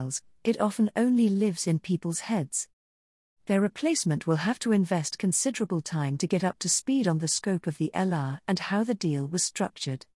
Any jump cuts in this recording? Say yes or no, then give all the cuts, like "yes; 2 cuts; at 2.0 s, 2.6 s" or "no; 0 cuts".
no; 0 cuts